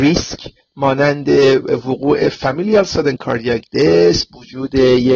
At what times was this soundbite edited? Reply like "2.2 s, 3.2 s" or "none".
none